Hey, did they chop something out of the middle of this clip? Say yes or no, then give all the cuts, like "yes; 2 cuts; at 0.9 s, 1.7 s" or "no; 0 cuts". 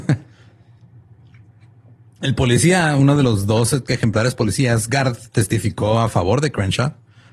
no; 0 cuts